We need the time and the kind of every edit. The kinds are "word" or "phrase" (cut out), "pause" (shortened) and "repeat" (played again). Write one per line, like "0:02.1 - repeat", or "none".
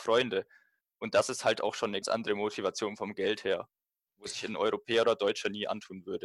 0:02.0 - word